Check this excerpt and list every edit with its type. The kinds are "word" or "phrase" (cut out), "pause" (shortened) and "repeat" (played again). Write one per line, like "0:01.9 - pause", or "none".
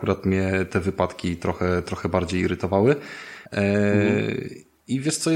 0:03.5 - pause